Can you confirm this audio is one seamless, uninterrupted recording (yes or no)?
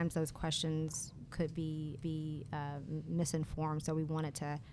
no